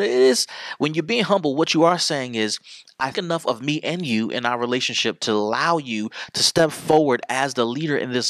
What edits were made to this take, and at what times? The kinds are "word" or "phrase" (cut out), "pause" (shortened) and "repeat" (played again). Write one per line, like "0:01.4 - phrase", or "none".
0:03.1 - word